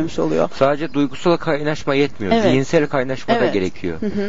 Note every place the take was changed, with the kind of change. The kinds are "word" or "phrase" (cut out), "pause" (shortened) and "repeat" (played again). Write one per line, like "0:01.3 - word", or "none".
none